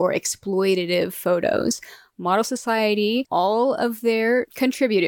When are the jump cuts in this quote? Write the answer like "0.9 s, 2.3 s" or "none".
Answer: 3.2 s